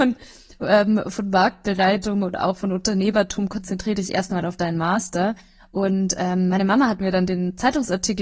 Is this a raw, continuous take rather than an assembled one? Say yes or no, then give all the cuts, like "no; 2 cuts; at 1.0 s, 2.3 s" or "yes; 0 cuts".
yes; 0 cuts